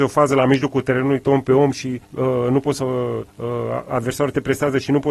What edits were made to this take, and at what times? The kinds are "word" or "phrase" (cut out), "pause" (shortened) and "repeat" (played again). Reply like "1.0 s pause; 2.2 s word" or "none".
1.2 s word; 2.0 s pause; 3.3 s pause